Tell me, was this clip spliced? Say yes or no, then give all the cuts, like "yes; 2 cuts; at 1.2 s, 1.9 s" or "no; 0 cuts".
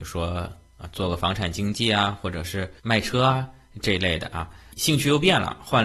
no; 0 cuts